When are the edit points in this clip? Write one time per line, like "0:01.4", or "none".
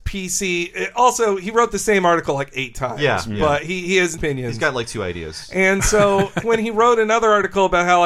0:04.2
0:06.4